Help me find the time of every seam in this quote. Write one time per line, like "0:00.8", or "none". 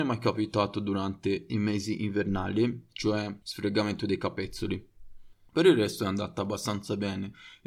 0:03.4